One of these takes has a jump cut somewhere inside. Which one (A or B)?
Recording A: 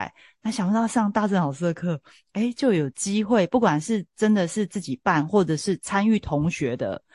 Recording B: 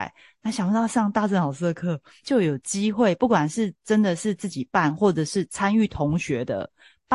B